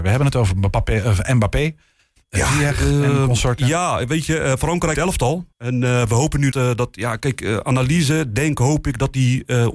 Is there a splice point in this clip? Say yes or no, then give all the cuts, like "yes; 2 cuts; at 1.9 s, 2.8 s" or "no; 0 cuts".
yes; 3 cuts; at 4.9 s, 5.5 s, 6.5 s